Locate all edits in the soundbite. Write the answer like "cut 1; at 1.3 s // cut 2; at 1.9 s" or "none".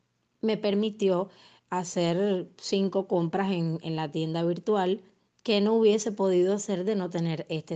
cut 1; at 5.2 s